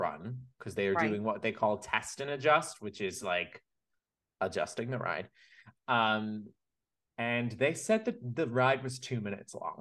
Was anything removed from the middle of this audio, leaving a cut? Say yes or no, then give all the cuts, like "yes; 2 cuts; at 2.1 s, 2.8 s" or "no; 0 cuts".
no; 0 cuts